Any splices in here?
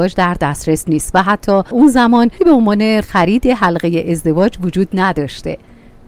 yes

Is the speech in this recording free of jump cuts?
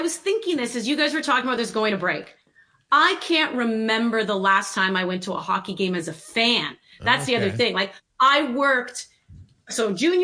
yes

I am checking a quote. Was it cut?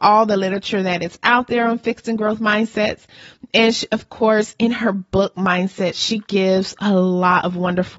no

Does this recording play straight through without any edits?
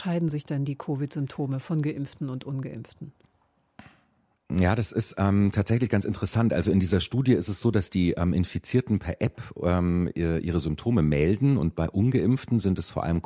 yes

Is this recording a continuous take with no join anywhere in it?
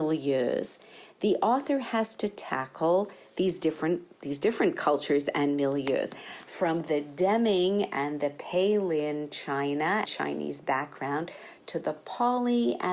no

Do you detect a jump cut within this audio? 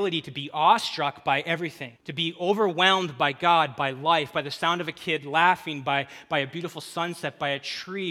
yes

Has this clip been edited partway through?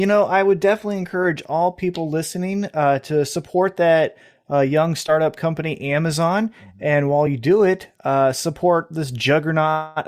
no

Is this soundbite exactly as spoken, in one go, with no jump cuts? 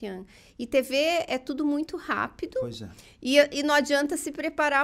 yes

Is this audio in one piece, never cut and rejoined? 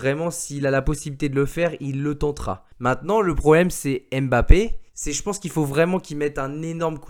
no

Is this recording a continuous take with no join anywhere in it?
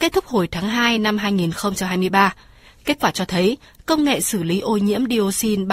yes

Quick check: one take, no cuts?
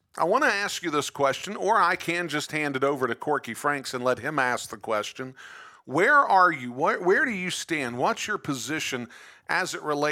yes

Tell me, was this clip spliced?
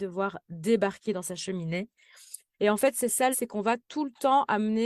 yes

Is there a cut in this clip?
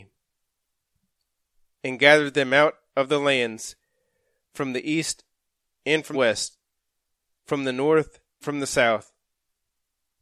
yes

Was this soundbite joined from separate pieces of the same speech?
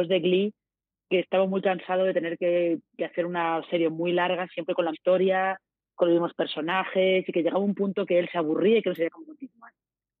yes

